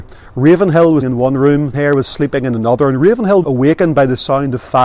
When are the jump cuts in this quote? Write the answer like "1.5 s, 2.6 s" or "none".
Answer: 1.0 s, 1.7 s, 3.4 s